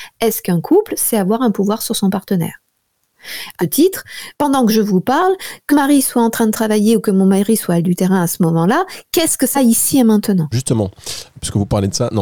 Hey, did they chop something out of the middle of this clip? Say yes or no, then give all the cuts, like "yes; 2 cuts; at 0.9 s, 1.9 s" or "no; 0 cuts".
yes; 5 cuts; at 3.6 s, 4.3 s, 5.7 s, 9.5 s, 10.5 s